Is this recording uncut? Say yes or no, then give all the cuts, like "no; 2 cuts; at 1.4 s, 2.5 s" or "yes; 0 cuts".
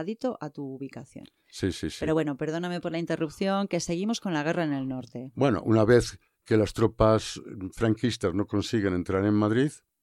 yes; 0 cuts